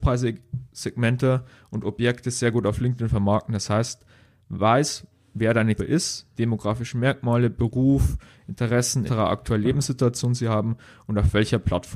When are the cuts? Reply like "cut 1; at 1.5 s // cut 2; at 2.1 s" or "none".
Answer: cut 1; at 5.8 s // cut 2; at 6.3 s // cut 3; at 9.1 s